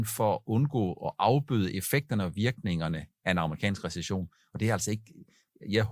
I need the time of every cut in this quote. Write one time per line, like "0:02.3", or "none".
none